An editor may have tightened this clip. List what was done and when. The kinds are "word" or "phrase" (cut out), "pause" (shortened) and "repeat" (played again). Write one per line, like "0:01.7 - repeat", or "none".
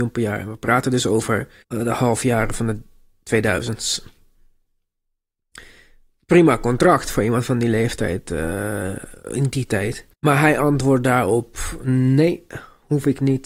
0:01.6 - pause
0:10.1 - pause